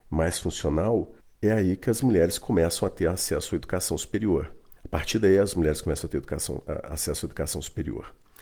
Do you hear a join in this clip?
yes; 2 cuts; at 1.2 s, 4.8 s

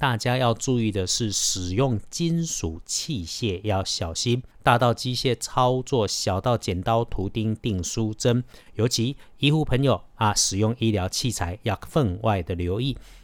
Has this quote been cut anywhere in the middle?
yes; 1 cut; at 4.5 s

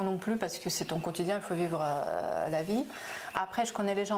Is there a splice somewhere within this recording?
no; 0 cuts

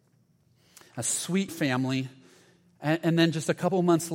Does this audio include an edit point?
yes; 1 cut; at 1.5 s

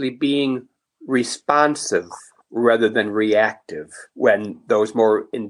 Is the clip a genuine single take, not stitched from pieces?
no; 1 cut; at 4.1 s

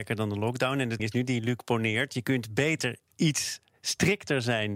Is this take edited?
yes; 1 cut; at 1.0 s

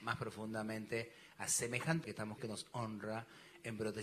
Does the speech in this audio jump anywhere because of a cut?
yes; 2 cuts; at 2.0 s, 2.4 s

